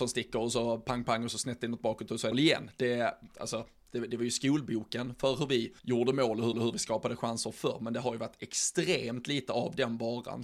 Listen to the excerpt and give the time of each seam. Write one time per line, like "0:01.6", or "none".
0:01.0
0:02.3
0:05.8
0:06.5